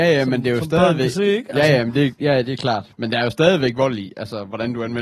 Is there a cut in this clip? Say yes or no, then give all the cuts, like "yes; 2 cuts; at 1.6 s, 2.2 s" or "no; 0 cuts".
no; 0 cuts